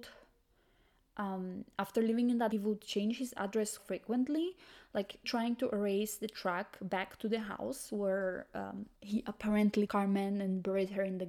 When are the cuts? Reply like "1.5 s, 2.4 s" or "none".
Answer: 2.5 s, 3.8 s, 5.2 s, 9.0 s, 9.9 s